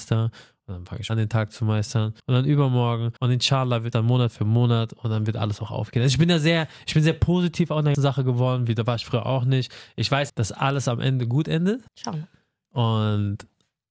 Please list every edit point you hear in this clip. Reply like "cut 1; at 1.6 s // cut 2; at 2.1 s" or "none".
cut 1; at 1.1 s // cut 2; at 2.2 s // cut 3; at 3.2 s // cut 4; at 3.9 s // cut 5; at 7.9 s // cut 6; at 10.3 s // cut 7; at 11.9 s

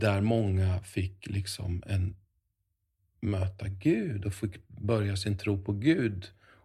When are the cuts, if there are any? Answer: none

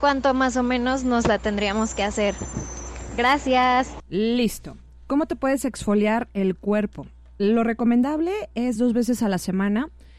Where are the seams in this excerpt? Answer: none

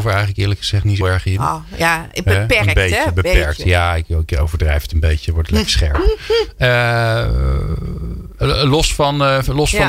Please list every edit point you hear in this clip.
cut 1; at 1.0 s

